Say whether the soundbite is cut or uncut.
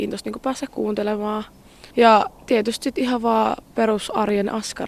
cut